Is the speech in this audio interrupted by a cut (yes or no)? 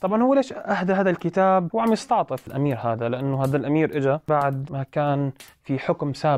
no